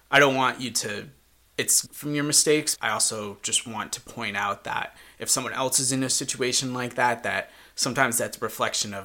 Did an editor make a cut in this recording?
yes; 2 cuts; at 1.9 s, 2.8 s

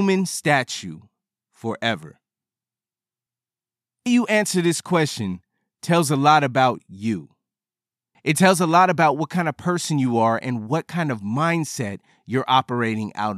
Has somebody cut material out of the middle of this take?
yes; 1 cut; at 4.1 s

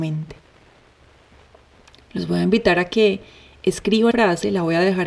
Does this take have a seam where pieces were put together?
yes; 1 cut; at 4.1 s

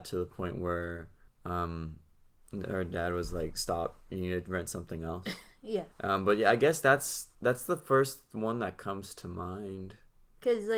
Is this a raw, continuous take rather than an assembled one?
no; 3 cuts; at 1.3 s, 5.9 s, 7.3 s

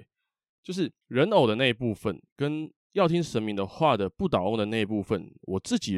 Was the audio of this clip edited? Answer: yes; 2 cuts; at 1.0 s, 2.8 s

